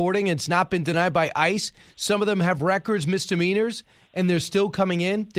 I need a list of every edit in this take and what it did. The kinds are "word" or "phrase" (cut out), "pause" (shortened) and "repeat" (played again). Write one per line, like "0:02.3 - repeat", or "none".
none